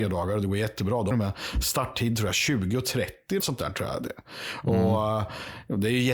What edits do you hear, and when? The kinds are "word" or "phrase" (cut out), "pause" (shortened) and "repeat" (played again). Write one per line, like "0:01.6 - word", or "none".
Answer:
0:01.1 - phrase
0:03.4 - word